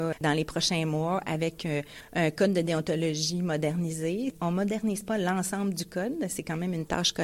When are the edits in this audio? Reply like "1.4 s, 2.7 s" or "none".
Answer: none